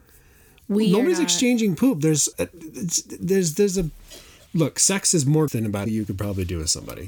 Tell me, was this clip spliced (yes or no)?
yes